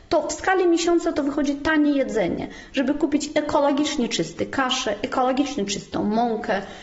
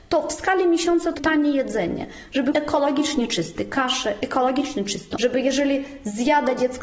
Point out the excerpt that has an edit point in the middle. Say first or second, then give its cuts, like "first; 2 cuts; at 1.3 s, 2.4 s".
second; 3 cuts; at 1.2 s, 2.5 s, 5.2 s